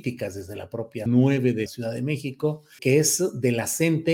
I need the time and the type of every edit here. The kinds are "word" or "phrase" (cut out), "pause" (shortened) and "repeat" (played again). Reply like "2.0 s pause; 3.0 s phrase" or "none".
1.1 s phrase; 1.7 s word; 2.8 s word